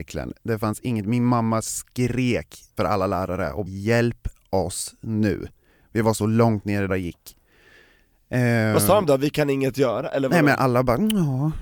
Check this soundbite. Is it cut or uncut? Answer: cut